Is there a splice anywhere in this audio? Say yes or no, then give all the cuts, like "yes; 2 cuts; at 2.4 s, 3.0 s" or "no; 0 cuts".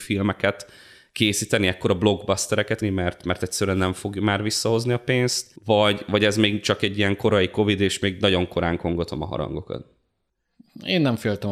yes; 2 cuts; at 2.8 s, 5.6 s